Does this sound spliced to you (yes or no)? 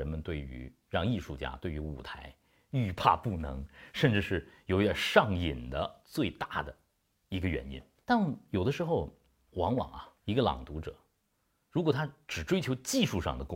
yes